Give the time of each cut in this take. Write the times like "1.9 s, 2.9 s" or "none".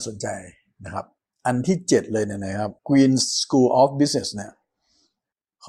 1.2 s, 2.8 s